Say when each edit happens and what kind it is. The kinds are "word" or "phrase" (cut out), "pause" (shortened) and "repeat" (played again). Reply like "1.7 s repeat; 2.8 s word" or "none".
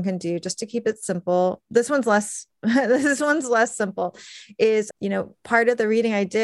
4.9 s word